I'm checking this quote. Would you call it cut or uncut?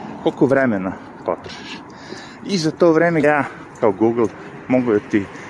cut